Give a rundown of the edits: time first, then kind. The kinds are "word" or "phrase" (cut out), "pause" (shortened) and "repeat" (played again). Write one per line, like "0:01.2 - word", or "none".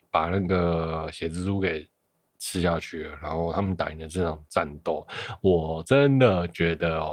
none